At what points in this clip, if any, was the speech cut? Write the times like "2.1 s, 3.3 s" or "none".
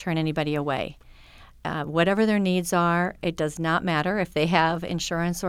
none